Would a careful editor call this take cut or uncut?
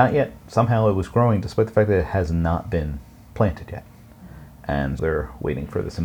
cut